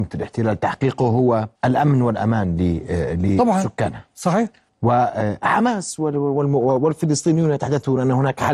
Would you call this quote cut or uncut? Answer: cut